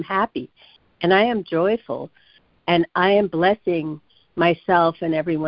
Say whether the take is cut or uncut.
uncut